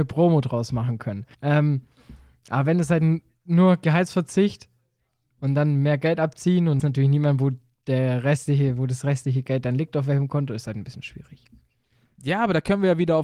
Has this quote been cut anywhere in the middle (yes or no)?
yes